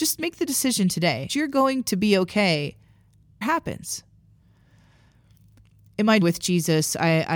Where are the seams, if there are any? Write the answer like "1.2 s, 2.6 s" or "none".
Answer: 1.3 s, 3.4 s, 6.2 s

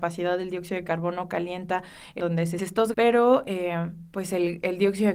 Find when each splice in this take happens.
2.2 s, 2.6 s, 2.9 s

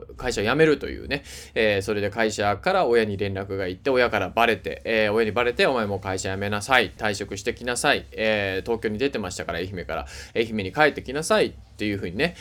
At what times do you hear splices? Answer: 7.0 s

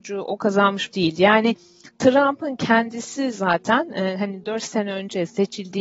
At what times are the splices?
0.9 s

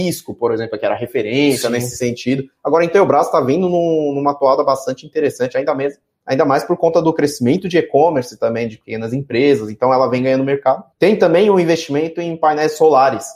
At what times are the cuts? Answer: 10.9 s

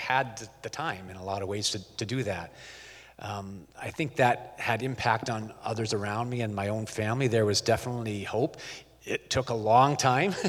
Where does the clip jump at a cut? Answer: none

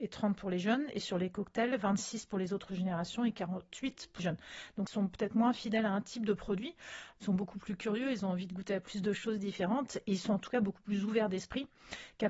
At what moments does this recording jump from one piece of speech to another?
4.2 s

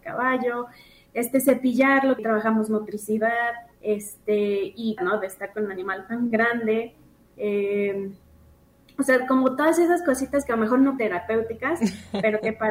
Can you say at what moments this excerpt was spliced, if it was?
2.2 s, 5.0 s, 11.0 s

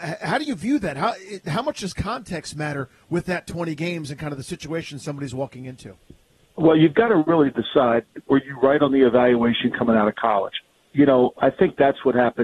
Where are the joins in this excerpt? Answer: none

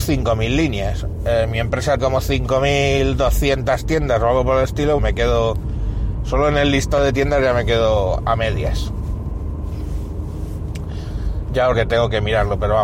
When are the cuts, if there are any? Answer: 2.0 s, 5.0 s, 11.7 s

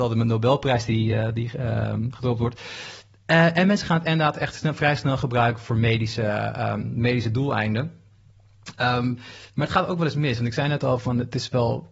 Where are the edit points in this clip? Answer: none

